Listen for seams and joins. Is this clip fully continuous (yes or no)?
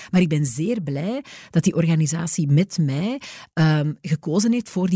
yes